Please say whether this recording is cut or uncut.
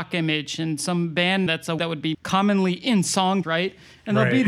cut